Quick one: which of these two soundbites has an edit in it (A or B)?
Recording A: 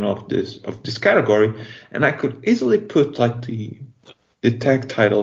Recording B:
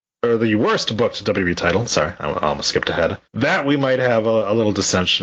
B